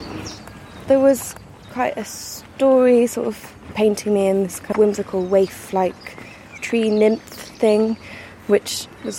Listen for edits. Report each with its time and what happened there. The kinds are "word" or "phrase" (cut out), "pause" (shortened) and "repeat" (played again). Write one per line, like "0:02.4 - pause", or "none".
0:04.7 - word